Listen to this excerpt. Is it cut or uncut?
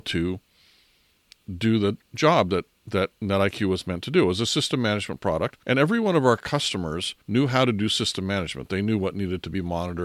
cut